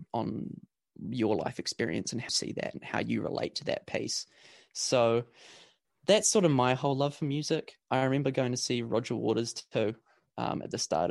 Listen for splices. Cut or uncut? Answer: cut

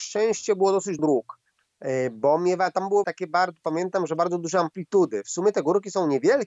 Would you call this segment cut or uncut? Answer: cut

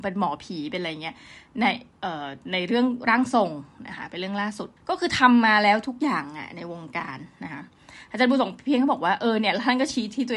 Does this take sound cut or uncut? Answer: cut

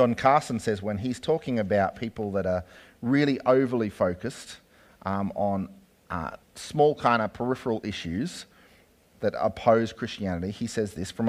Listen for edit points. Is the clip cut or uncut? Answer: cut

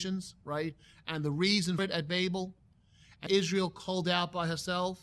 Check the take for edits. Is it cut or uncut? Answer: cut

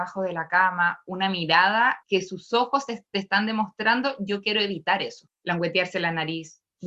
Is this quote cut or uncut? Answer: cut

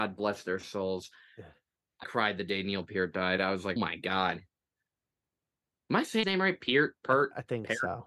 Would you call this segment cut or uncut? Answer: cut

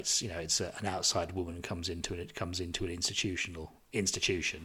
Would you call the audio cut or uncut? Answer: uncut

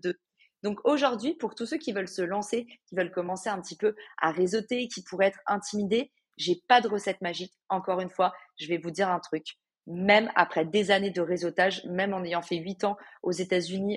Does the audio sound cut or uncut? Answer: uncut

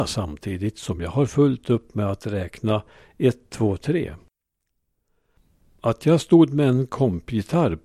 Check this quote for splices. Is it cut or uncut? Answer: uncut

